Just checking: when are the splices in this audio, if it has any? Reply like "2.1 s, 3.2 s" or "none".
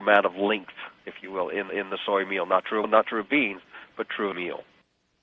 1.7 s, 2.8 s, 4.3 s